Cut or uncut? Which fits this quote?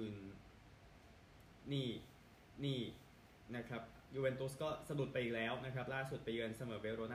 cut